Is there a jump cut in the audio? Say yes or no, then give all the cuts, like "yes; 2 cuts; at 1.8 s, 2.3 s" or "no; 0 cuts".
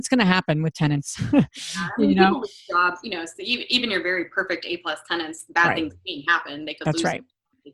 no; 0 cuts